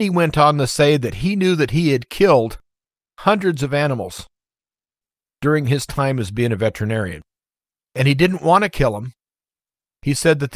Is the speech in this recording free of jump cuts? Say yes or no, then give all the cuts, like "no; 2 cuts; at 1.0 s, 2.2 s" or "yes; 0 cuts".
yes; 0 cuts